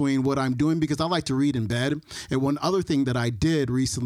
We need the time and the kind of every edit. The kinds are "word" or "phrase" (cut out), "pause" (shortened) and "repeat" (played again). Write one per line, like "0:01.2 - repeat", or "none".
none